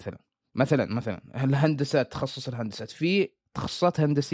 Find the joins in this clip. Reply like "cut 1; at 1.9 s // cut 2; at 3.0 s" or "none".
none